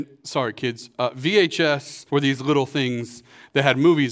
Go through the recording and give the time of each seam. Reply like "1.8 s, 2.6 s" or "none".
2.1 s

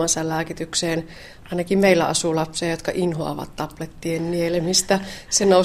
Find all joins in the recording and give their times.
none

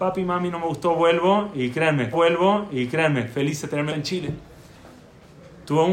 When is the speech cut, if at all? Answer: 2.1 s, 3.9 s

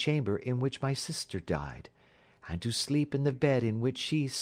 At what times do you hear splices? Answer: 3.3 s

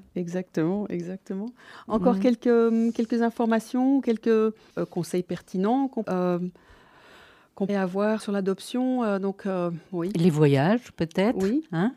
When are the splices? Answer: 4.7 s, 6.0 s, 7.7 s, 8.2 s

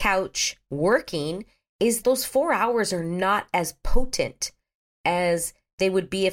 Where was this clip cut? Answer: 2.0 s

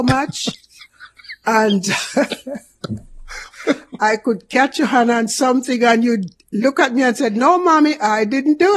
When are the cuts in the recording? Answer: none

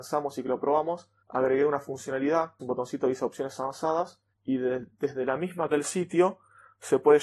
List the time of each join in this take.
1.2 s, 2.6 s, 4.3 s, 5.7 s

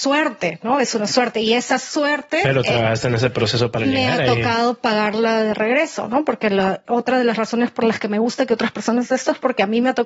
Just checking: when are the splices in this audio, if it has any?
6.8 s

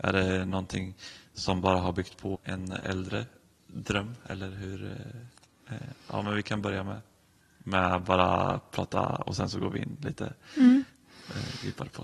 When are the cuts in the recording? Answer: 2.3 s

